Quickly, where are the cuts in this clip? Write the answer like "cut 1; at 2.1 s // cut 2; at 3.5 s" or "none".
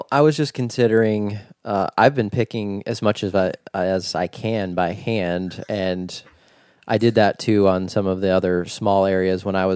none

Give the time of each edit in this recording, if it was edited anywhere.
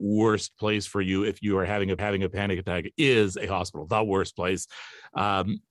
cut 1; at 2.0 s

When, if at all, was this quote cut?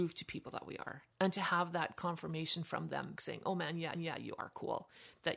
cut 1; at 1.1 s // cut 2; at 3.2 s // cut 3; at 3.9 s

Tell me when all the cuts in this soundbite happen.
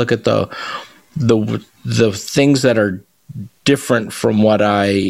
none

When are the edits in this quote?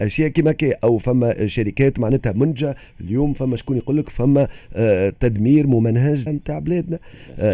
cut 1; at 6.3 s

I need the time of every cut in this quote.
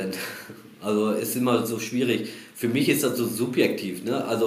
none

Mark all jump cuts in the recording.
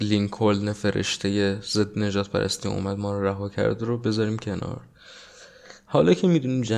none

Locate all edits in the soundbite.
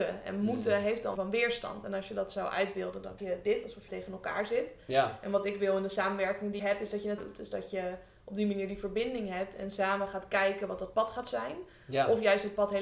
cut 1; at 1.1 s // cut 2; at 3.2 s // cut 3; at 3.9 s // cut 4; at 6.6 s // cut 5; at 7.2 s

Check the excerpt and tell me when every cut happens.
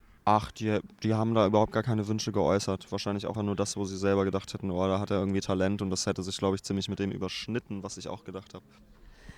cut 1; at 3.3 s

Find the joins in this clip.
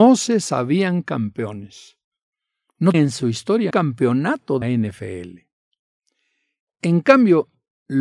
cut 1; at 2.9 s // cut 2; at 3.7 s // cut 3; at 4.6 s

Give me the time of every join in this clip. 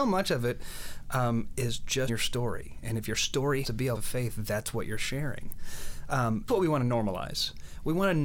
cut 1; at 1.5 s // cut 2; at 2.1 s // cut 3; at 3.6 s // cut 4; at 3.9 s // cut 5; at 6.5 s

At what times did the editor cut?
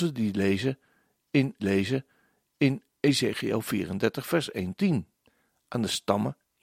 cut 1; at 1.6 s // cut 2; at 4.8 s // cut 3; at 5.3 s

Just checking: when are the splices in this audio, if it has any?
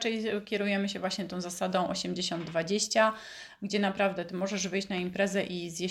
none

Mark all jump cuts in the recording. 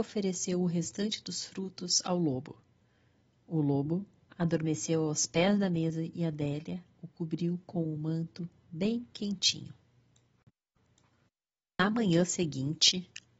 none

